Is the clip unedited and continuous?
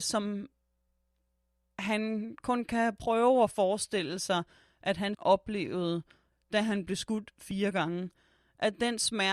no; 1 cut; at 5.1 s

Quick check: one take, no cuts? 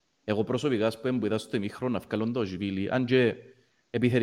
yes; 0 cuts

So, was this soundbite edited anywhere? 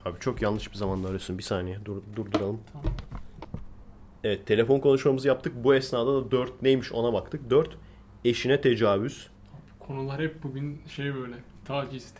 yes; 1 cut; at 4.2 s

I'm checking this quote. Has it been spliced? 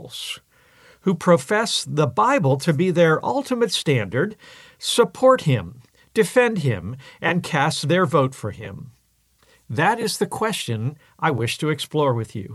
no; 0 cuts

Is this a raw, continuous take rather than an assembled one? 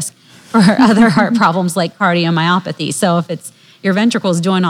yes; 0 cuts

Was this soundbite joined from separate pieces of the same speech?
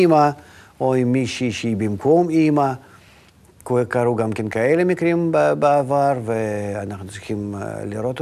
no; 0 cuts

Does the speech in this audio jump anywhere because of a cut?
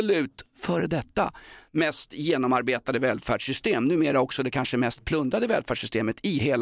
no; 0 cuts

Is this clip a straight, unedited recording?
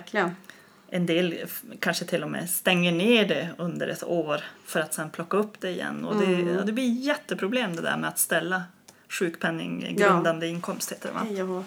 yes; 0 cuts

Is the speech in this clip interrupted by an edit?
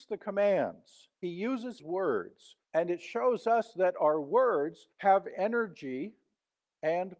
yes; 3 cuts; at 1.8 s, 2.7 s, 4.9 s

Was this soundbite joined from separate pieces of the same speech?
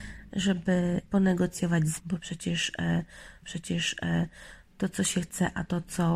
yes; 3 cuts; at 1.0 s, 2.0 s, 3.4 s

